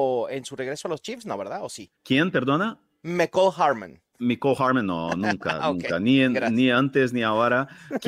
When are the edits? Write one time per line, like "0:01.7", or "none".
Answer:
0:02.0